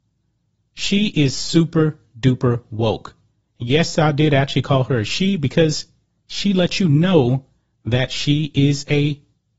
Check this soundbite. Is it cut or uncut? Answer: uncut